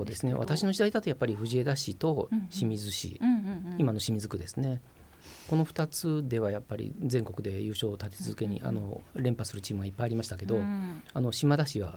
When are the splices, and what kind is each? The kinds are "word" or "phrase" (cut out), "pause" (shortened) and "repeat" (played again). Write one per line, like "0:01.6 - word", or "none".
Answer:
none

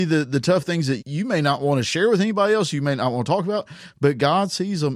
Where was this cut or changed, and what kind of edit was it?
0:01.0 - word

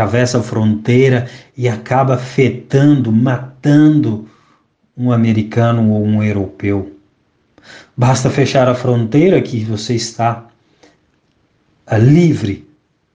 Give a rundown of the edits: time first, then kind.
none

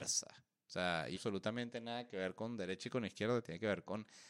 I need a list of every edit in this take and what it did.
0:01.1 - phrase

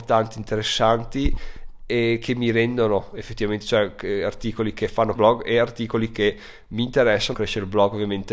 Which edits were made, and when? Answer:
0:05.1 - word
0:07.3 - phrase

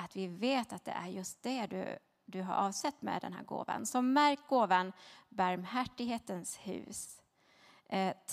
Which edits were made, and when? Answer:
none

